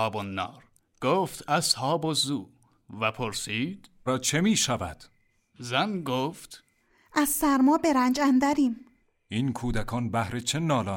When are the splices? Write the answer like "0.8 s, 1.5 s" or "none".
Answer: 4.1 s